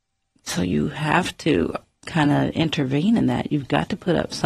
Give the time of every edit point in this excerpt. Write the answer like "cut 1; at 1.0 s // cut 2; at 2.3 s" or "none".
none